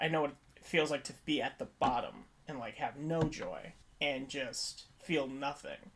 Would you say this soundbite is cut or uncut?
cut